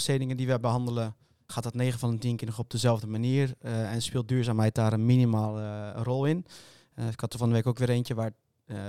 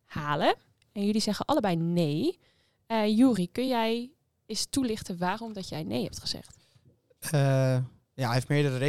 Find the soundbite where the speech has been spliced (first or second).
first